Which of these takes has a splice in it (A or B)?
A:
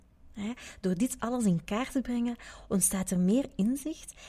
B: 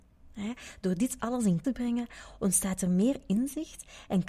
B